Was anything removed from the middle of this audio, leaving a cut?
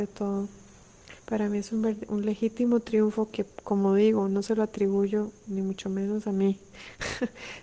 yes; 1 cut; at 1.2 s

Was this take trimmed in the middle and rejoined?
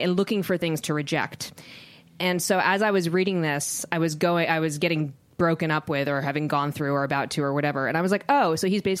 no; 0 cuts

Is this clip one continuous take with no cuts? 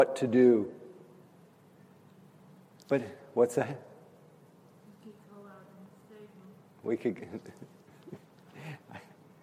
yes; 0 cuts

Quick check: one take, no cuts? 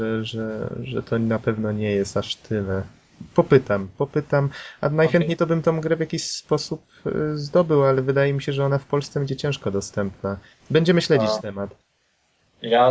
yes; 0 cuts

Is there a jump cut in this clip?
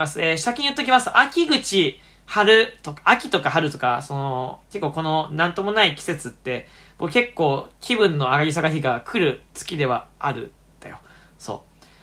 no; 0 cuts

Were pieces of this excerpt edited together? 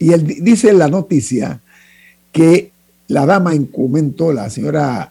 no; 0 cuts

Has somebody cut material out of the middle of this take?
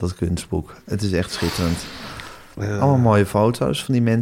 no; 0 cuts

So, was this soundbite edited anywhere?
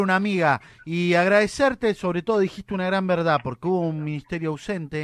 no; 0 cuts

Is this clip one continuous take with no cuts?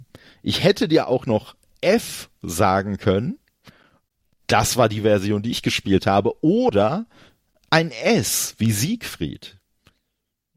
yes; 0 cuts

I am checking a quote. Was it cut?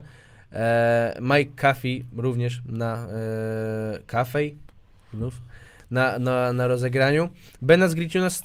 no; 0 cuts

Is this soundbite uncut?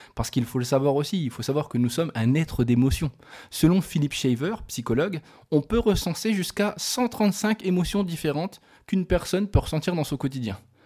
yes; 0 cuts

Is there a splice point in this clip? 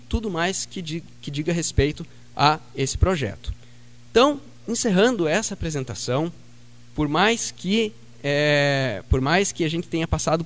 no; 0 cuts

